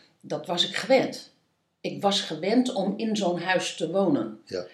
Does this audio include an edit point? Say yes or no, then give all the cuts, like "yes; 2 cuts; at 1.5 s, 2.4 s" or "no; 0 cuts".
no; 0 cuts